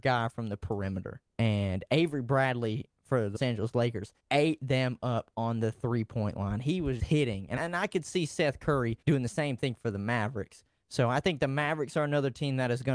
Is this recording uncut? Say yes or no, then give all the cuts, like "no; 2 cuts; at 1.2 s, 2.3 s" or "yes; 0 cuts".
no; 6 cuts; at 1.3 s, 3.4 s, 4.2 s, 7.0 s, 7.6 s, 9.0 s